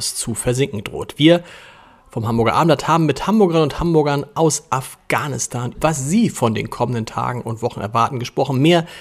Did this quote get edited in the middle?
yes; 1 cut; at 5.7 s

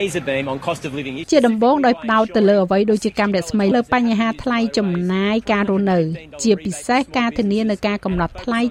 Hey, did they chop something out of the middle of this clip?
yes; 2 cuts; at 1.2 s, 3.7 s

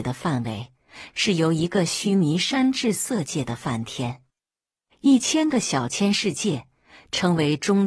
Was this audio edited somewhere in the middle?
no; 0 cuts

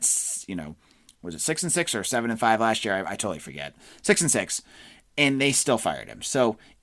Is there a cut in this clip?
no; 0 cuts

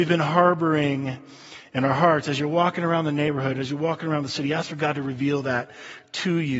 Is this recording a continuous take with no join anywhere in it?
yes; 0 cuts

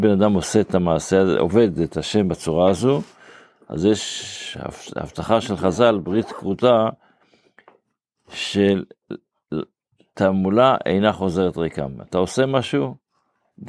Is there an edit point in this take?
no; 0 cuts

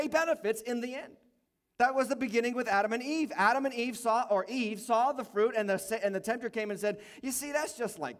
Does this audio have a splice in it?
yes; 1 cut; at 1.4 s

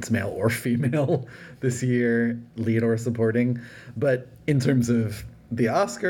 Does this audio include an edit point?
no; 0 cuts

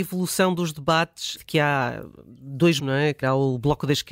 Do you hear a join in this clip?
yes; 3 cuts; at 1.4 s, 2.8 s, 3.2 s

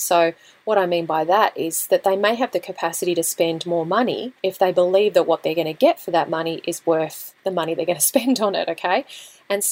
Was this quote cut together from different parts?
yes; 2 cuts; at 4.4 s, 7.4 s

